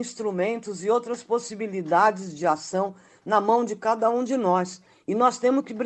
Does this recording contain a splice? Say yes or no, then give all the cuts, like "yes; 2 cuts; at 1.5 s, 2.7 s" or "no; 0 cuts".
no; 0 cuts